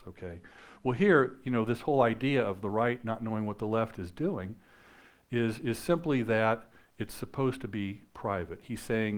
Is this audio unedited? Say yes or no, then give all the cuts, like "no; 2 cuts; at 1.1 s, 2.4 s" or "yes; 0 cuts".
yes; 0 cuts